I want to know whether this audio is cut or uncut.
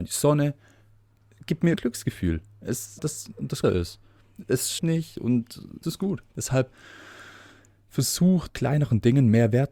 cut